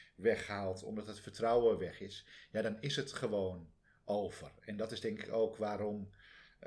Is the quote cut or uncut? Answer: uncut